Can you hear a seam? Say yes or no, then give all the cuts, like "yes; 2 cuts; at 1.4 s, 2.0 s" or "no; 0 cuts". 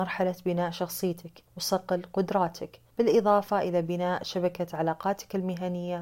yes; 2 cuts; at 1.5 s, 2.9 s